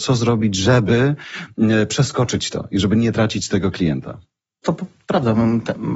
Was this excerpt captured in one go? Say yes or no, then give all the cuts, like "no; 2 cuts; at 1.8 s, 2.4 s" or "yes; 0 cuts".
yes; 0 cuts